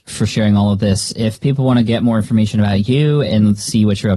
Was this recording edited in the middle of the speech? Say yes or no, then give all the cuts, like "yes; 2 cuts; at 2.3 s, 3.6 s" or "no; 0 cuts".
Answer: no; 0 cuts